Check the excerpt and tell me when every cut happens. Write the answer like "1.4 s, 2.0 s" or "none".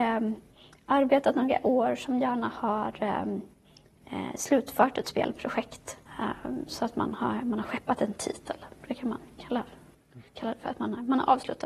6.1 s, 10.3 s